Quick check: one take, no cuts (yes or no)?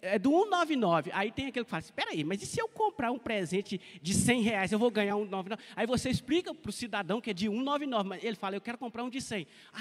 yes